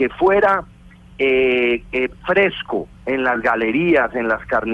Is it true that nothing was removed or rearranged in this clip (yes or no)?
yes